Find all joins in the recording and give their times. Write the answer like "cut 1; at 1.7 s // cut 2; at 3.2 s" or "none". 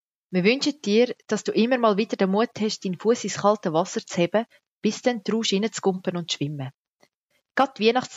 none